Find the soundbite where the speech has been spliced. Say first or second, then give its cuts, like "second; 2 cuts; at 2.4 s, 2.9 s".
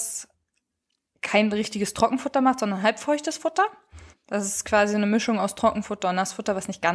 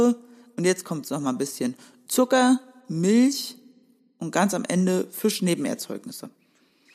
first; 1 cut; at 4.1 s